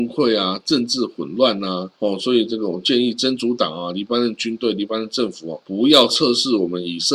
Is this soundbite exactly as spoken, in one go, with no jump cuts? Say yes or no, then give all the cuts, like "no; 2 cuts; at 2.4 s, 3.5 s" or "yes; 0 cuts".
no; 2 cuts; at 1.9 s, 5.6 s